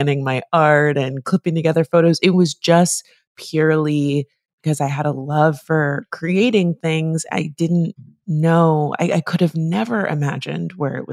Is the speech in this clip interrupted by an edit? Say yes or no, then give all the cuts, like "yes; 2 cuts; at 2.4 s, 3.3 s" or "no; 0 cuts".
no; 0 cuts